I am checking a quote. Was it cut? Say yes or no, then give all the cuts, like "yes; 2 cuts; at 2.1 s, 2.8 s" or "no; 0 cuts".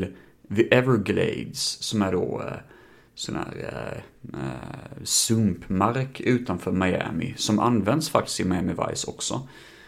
no; 0 cuts